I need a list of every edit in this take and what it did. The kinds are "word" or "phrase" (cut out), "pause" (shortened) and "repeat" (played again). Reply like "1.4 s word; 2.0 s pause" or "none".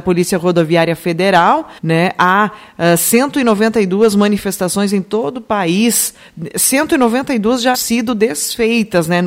1.8 s pause; 7.7 s word